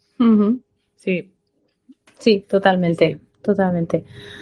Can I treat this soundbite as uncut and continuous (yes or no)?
yes